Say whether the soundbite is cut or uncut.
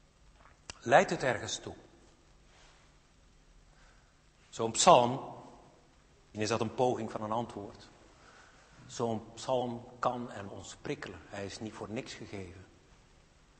cut